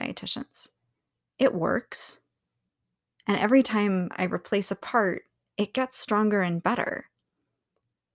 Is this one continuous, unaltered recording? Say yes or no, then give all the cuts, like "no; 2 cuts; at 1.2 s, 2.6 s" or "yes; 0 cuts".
yes; 0 cuts